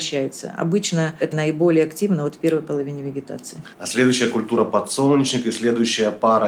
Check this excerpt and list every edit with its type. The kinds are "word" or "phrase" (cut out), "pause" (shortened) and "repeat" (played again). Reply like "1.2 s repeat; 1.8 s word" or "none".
1.3 s word; 3.7 s pause